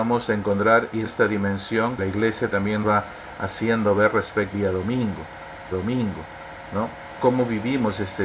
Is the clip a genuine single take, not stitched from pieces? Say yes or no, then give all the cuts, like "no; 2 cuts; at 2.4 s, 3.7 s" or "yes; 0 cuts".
no; 6 cuts; at 1.1 s, 2.0 s, 2.8 s, 4.5 s, 5.7 s, 7.2 s